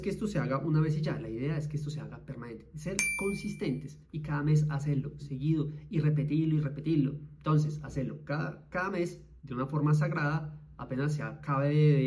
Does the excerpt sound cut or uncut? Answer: cut